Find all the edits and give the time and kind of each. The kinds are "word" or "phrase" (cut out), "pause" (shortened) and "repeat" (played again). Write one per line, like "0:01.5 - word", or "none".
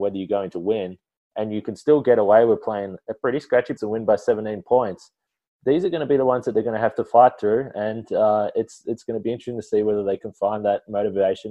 0:03.8 - word